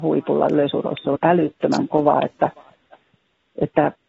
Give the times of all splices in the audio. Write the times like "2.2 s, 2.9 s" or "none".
1.2 s